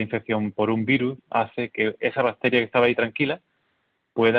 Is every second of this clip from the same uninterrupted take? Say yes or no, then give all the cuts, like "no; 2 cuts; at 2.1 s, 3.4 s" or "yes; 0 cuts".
yes; 0 cuts